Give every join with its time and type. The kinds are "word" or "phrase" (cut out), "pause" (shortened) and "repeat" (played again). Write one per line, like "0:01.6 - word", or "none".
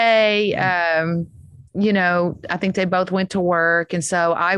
0:01.7 - pause